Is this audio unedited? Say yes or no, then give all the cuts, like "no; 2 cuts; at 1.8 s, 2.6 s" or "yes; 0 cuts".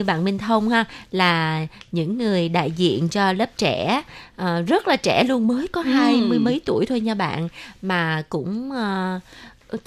yes; 0 cuts